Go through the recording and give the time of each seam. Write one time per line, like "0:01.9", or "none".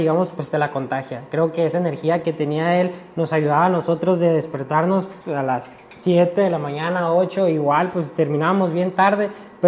0:05.2